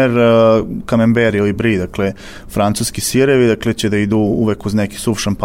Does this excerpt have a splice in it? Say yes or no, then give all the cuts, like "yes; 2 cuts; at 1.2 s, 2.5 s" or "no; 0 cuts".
no; 0 cuts